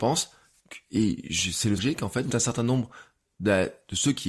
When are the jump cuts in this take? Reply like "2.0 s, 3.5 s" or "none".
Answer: 1.8 s, 2.3 s